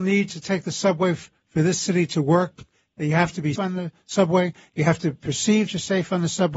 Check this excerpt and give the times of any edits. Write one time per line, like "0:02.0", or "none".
0:03.6
0:05.7

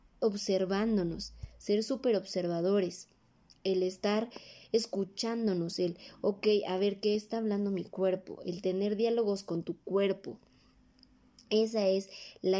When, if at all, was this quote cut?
none

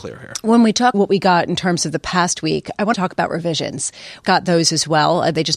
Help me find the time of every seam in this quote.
0:00.9
0:02.9
0:04.2

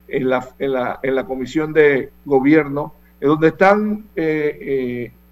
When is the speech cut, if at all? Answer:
none

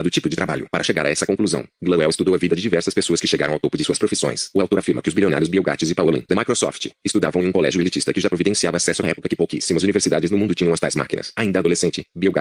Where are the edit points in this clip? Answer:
0:06.3
0:09.0

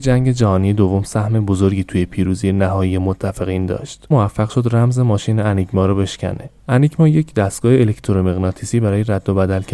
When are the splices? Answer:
0:04.1
0:06.6

